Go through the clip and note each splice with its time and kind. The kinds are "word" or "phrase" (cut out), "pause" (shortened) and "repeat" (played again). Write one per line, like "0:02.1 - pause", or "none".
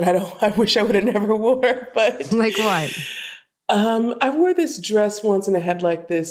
none